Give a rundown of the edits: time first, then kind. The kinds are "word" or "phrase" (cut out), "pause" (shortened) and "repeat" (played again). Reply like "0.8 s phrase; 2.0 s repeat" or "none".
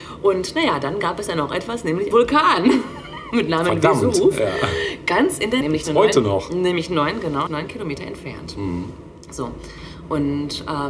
2.1 s word; 5.6 s word; 7.5 s word